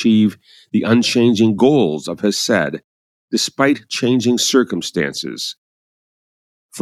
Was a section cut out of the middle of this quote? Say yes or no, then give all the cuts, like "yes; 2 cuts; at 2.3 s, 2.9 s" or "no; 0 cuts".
no; 0 cuts